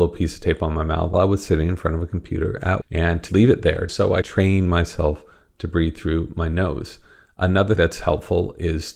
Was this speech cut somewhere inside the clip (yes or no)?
yes